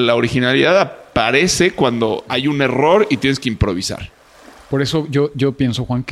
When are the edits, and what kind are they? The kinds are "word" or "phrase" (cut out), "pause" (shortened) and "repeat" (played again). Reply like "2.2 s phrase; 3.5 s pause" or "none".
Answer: none

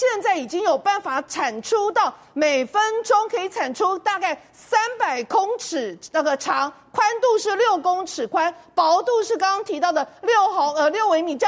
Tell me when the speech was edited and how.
none

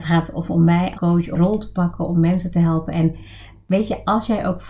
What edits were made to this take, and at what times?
0.9 s word; 1.3 s word

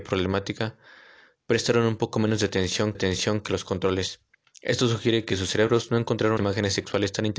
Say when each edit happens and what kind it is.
2.9 s repeat; 4.3 s pause; 6.4 s word

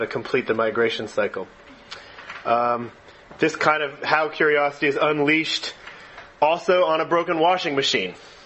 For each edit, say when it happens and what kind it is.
none

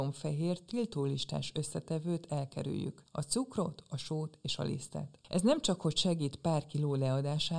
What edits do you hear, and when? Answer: 5.2 s pause

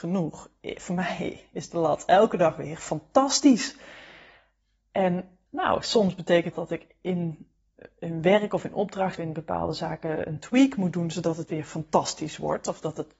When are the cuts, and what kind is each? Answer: 5.5 s pause; 6.5 s word; 9.2 s word

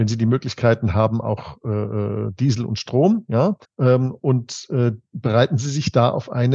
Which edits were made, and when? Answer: 3.6 s pause

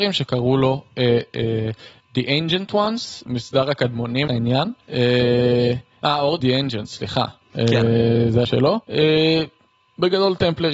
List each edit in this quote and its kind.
3.2 s word; 4.3 s word; 4.8 s pause; 6.4 s word; 7.4 s pause; 8.4 s word; 8.8 s pause

